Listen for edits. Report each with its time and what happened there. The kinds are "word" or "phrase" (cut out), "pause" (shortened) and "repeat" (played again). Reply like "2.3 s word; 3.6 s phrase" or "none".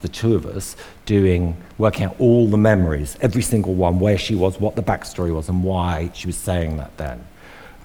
none

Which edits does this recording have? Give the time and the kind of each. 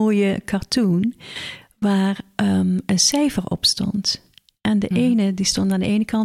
none

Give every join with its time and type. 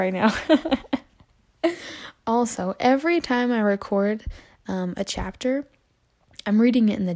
none

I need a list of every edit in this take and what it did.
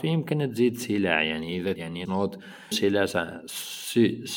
1.8 s word; 2.1 s word; 2.7 s word

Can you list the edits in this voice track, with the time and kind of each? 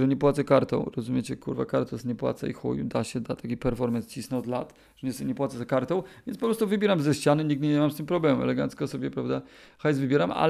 none

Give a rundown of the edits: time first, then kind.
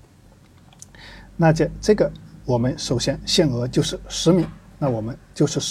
none

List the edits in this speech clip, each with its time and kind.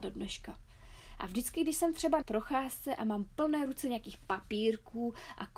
2.2 s word

